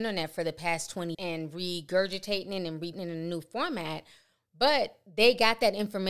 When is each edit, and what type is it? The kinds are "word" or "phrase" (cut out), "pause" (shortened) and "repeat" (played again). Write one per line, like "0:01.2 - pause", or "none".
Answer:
0:01.1 - word
0:02.9 - word